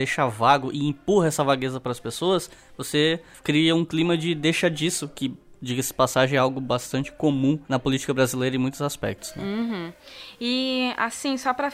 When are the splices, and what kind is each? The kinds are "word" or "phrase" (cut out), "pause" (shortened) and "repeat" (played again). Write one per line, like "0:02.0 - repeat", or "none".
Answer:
0:07.6 - pause

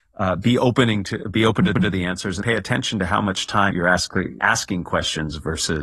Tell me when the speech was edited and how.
0:01.7 - repeat
0:02.4 - word
0:03.7 - word
0:04.4 - word

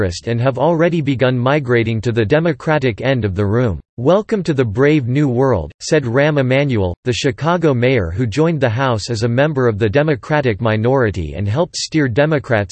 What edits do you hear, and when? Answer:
0:03.9 - pause

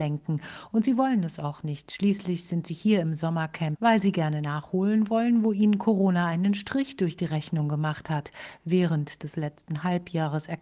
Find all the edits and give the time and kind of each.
none

